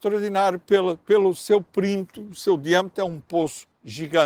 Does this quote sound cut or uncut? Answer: uncut